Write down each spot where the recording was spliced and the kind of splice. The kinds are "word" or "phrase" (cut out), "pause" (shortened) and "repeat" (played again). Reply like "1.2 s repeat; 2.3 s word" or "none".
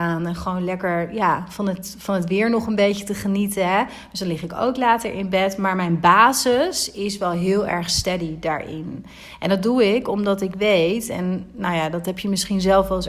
none